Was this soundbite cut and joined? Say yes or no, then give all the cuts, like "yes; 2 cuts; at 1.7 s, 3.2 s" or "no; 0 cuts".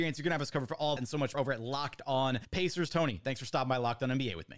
yes; 3 cuts; at 1.0 s, 1.3 s, 2.4 s